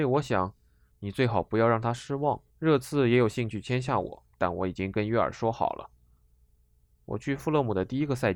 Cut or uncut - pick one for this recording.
cut